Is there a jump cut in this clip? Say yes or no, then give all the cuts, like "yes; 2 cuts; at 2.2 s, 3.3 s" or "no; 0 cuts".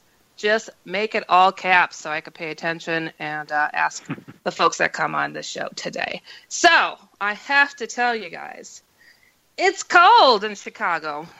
yes; 2 cuts; at 4.4 s, 7.2 s